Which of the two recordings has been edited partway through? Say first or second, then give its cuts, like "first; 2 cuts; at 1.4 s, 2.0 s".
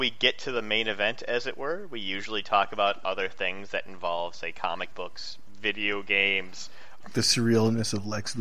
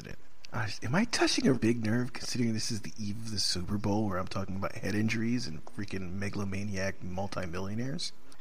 second; 1 cut; at 1.5 s